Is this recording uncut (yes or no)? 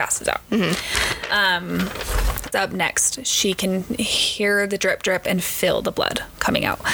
no